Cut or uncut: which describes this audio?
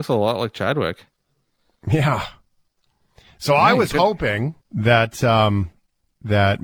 cut